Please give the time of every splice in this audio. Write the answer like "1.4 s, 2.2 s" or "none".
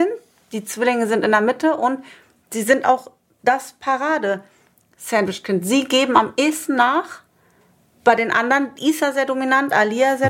none

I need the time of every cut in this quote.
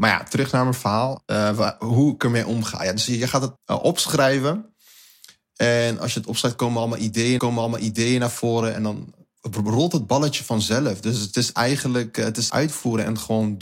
3.6 s, 7.4 s, 12.5 s

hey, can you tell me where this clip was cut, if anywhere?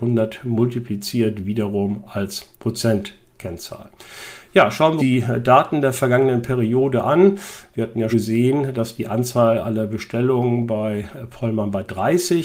2.5 s, 5.0 s, 8.1 s

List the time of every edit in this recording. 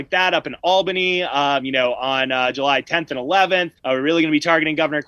3.8 s

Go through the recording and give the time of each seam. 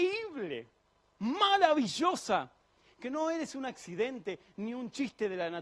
none

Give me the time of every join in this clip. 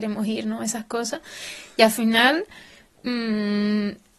none

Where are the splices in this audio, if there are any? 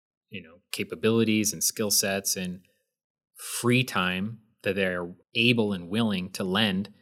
5.2 s

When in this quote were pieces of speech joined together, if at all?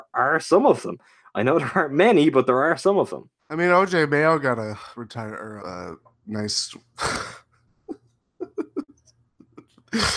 3.4 s, 4.9 s, 5.6 s

